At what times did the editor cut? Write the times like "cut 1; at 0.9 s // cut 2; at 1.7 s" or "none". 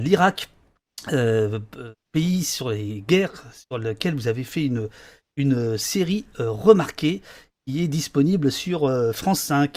none